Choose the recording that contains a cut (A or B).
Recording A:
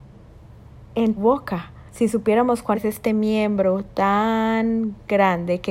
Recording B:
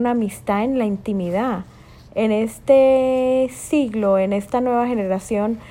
A